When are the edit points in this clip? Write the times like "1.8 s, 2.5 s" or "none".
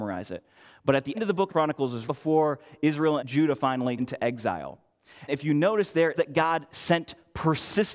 1.1 s, 1.5 s, 2.0 s, 3.2 s, 4.0 s, 5.3 s, 6.1 s